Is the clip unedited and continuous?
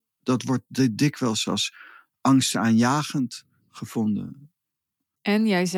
yes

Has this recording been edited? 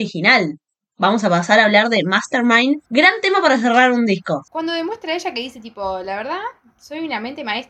yes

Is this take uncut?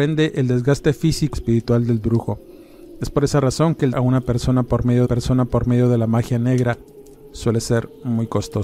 no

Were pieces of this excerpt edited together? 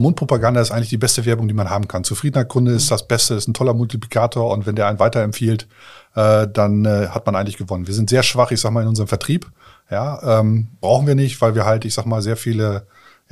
no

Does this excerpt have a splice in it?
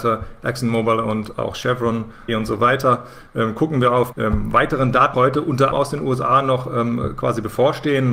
yes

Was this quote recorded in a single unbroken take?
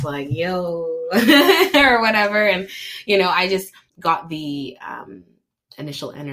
no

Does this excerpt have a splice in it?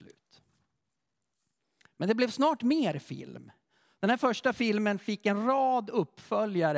no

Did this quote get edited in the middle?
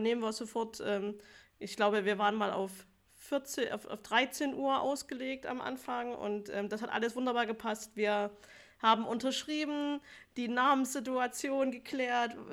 no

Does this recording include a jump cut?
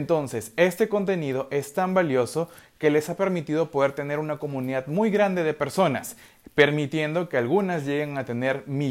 no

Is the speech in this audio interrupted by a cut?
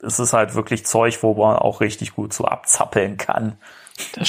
no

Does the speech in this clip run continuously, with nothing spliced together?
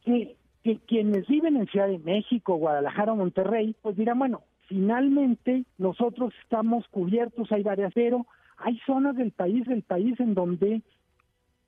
no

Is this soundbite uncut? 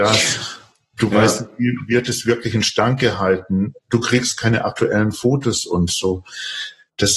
yes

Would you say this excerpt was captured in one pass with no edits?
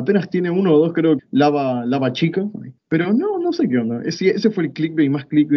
no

